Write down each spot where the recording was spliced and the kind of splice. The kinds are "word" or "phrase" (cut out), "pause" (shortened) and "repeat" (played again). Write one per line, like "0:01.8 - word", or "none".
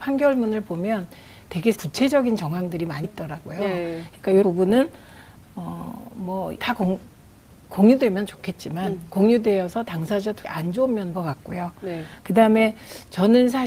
0:01.7 - word
0:03.0 - word
0:04.4 - word
0:06.6 - word
0:10.4 - word
0:11.1 - word